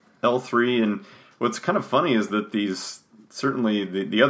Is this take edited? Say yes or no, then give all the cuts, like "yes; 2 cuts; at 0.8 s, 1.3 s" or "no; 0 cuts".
no; 0 cuts